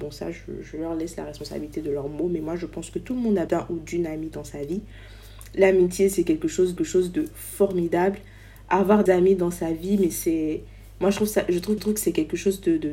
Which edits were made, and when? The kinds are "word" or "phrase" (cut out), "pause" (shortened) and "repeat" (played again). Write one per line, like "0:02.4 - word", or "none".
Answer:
0:03.5 - word
0:06.8 - repeat
0:09.1 - word
0:11.8 - repeat